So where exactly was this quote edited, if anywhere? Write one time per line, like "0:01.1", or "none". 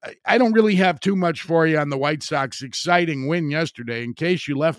none